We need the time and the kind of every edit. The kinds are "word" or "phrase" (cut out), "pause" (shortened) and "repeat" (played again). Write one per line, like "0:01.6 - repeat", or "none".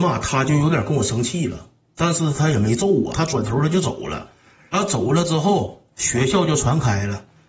0:03.1 - phrase